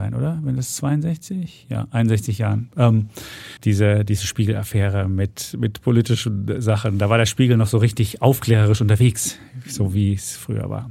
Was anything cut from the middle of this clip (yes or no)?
yes